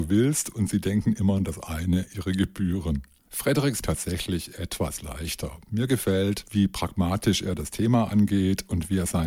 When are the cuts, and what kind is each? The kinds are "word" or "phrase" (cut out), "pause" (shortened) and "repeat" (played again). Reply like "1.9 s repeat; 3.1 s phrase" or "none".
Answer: 1.4 s word; 3.8 s phrase